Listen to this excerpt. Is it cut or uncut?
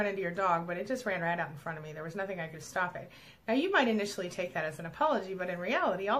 cut